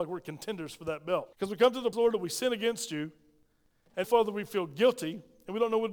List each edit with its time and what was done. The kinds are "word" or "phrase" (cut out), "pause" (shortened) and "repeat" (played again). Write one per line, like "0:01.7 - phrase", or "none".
0:01.3 - pause
0:01.9 - word
0:04.0 - word